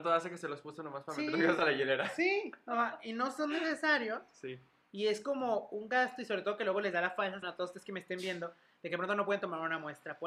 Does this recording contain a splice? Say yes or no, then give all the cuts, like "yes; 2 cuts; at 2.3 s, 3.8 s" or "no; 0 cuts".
yes; 1 cut; at 7.4 s